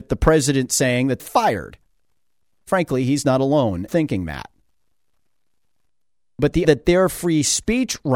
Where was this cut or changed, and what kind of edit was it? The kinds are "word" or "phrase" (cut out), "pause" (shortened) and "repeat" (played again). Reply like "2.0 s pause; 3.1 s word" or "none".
1.2 s phrase; 3.9 s word; 6.6 s word